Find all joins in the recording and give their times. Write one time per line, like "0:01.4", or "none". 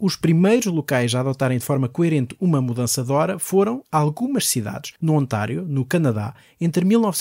0:05.0